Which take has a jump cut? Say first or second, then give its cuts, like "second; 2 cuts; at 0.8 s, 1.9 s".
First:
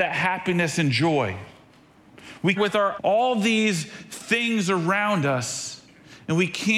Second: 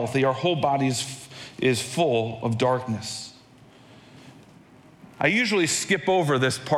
first; 2 cuts; at 2.6 s, 3.0 s